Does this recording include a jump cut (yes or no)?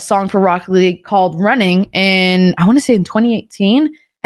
no